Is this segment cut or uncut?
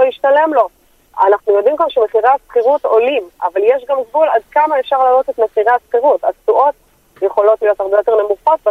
uncut